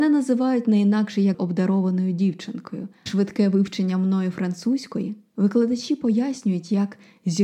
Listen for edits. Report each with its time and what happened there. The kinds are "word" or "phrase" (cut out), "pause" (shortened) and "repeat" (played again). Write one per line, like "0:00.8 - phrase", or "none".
0:01.3 - word
0:03.1 - word

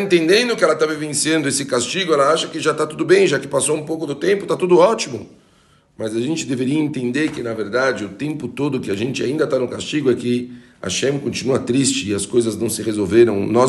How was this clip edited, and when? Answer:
none

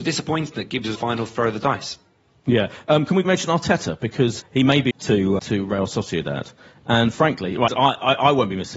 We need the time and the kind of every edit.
0:00.9 - word
0:03.2 - word
0:04.4 - word
0:04.9 - word
0:05.4 - word
0:07.7 - word

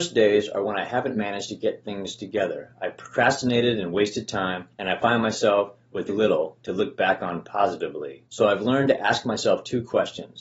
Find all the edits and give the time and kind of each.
0:04.7 - pause
0:06.1 - word
0:08.3 - pause

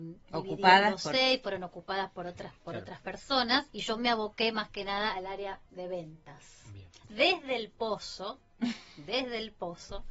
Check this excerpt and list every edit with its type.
0:02.6 - pause
0:03.7 - pause
0:05.7 - pause

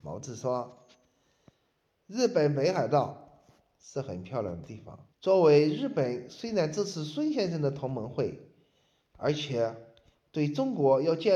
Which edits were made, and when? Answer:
0:05.1 - pause

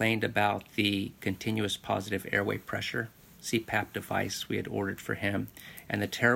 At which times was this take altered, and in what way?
none

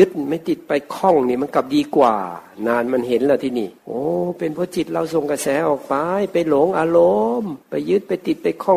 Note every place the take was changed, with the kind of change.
0:03.8 - pause
0:07.6 - pause

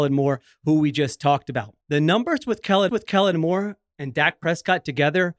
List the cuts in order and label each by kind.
0:01.8 - pause
0:02.9 - repeat

